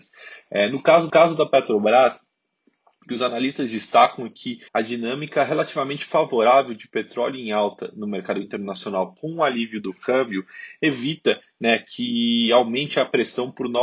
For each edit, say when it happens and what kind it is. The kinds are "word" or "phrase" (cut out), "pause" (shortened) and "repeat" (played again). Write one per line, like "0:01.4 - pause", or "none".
0:01.1 - repeat
0:04.7 - pause

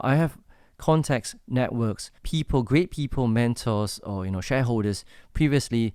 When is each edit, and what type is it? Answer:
0:02.2 - pause

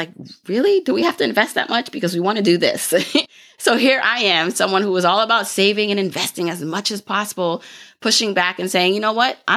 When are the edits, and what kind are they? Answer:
none

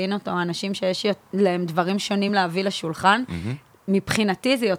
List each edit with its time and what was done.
none

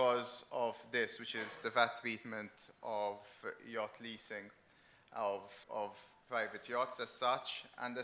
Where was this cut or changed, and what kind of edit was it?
0:05.6 - word

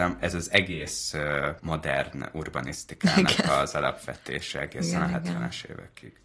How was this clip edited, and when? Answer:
none

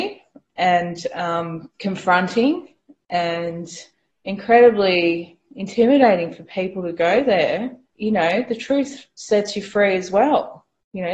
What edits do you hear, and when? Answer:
0:01.7 - pause
0:03.9 - pause
0:07.8 - pause

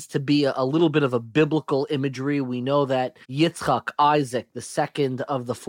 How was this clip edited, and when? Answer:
0:03.2 - pause

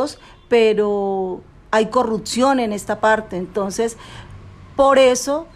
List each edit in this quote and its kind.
none

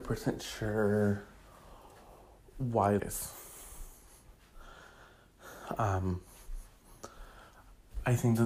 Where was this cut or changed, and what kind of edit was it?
0:03.0 - word

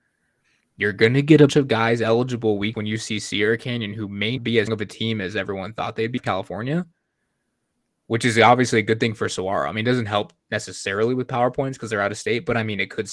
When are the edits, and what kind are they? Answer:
0:01.5 - word
0:02.7 - word
0:04.4 - word
0:04.7 - word
0:06.2 - word

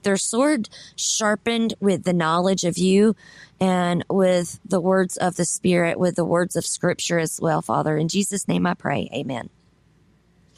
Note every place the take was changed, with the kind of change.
none

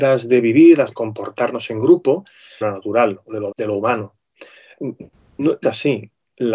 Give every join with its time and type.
0:00.9 - word
0:02.6 - phrase
0:03.5 - word
0:05.6 - word

